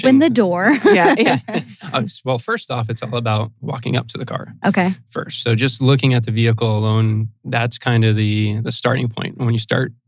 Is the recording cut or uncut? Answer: uncut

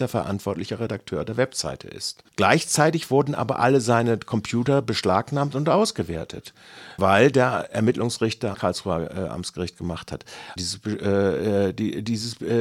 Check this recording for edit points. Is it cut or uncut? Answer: cut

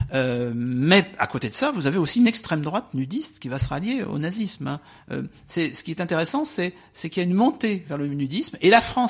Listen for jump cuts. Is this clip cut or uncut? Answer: uncut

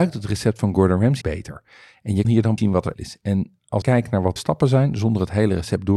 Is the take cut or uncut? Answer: cut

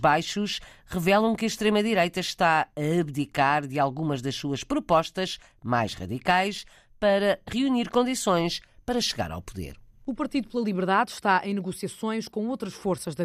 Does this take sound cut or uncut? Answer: uncut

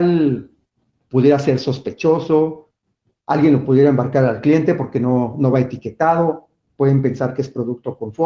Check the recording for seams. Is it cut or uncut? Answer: uncut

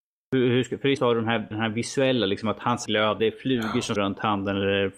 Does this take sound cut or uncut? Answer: cut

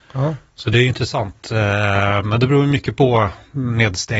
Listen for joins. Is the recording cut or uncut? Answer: uncut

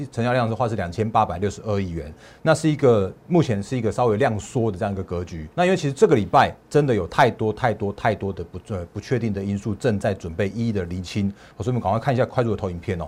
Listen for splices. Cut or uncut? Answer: cut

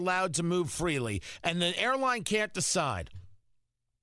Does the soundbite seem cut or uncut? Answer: uncut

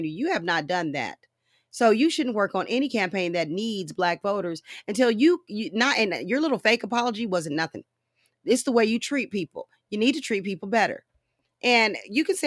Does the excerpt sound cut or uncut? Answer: uncut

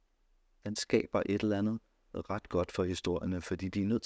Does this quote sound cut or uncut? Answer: uncut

